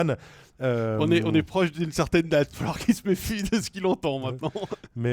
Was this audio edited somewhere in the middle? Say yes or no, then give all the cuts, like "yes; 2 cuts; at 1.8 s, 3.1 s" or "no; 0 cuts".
yes; 1 cut; at 2.5 s